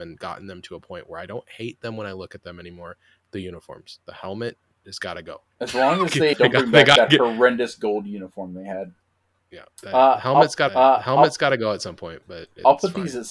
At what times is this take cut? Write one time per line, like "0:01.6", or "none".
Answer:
0:05.5
0:06.3
0:09.7
0:10.7

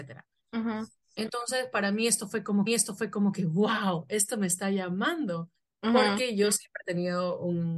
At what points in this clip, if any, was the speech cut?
0:02.7

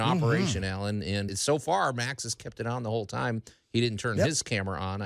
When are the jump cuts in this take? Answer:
0:01.3

